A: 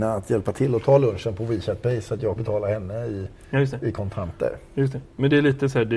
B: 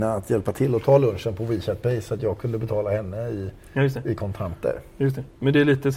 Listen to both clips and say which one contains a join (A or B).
A